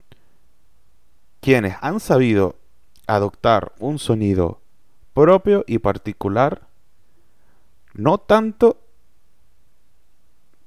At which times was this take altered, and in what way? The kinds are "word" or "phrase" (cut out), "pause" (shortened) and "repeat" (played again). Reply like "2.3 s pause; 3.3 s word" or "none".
none